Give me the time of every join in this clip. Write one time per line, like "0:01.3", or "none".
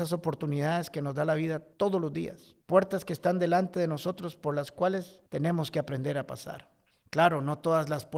0:01.7
0:02.6
0:05.3
0:06.9